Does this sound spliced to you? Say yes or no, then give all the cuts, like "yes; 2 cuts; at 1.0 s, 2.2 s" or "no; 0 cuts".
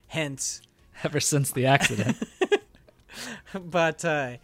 yes; 1 cut; at 0.9 s